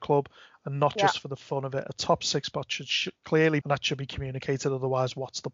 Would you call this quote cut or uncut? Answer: cut